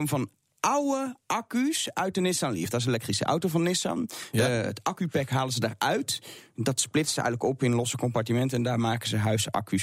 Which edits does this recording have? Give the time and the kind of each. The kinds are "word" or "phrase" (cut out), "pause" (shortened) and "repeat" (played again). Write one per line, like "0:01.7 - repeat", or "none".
none